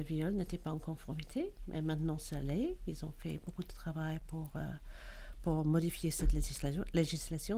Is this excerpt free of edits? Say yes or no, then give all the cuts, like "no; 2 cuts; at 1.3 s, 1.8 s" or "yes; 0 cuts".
yes; 0 cuts